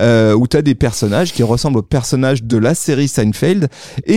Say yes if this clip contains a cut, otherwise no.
no